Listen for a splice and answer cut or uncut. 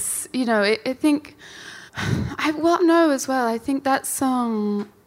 cut